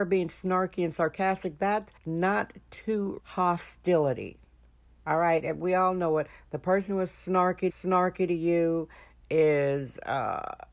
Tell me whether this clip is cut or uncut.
cut